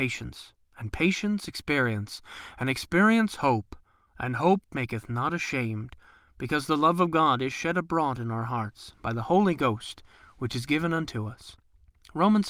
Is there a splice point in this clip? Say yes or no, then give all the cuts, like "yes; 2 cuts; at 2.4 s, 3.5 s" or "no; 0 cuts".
no; 0 cuts